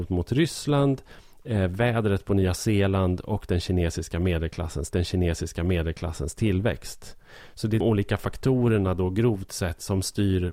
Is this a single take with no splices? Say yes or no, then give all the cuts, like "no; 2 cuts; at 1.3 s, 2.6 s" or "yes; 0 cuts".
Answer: no; 2 cuts; at 4.9 s, 7.8 s